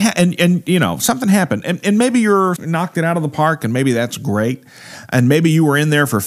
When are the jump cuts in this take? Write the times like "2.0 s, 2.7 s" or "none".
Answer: 2.6 s